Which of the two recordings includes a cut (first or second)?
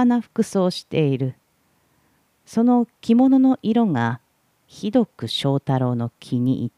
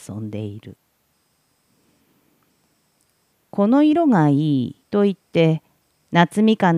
second